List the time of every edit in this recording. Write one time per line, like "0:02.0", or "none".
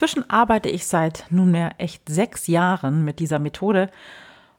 none